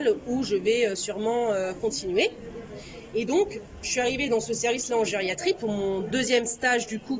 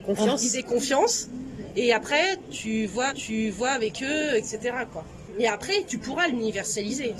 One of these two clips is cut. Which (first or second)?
second